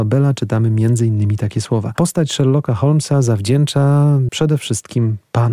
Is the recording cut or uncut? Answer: cut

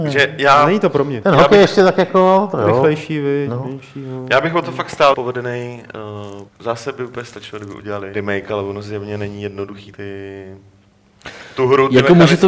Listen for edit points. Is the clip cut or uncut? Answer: cut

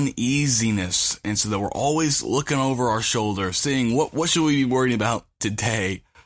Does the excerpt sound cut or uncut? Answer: uncut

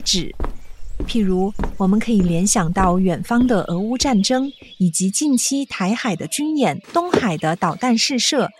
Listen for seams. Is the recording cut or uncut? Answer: cut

